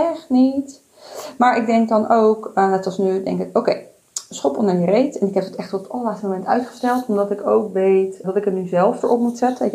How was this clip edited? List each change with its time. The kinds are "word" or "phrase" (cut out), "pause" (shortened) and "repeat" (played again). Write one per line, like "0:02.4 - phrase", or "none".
0:08.2 - word